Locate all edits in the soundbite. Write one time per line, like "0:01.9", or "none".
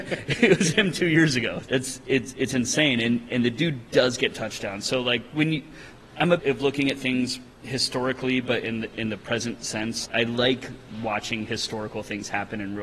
0:01.7
0:06.4
0:07.5
0:10.1